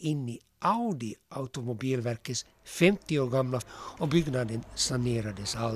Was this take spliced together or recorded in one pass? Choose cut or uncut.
cut